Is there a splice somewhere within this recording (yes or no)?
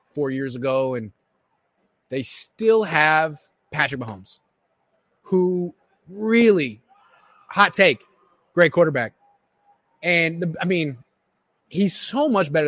no